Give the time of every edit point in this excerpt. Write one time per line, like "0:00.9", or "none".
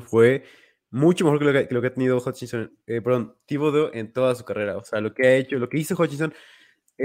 none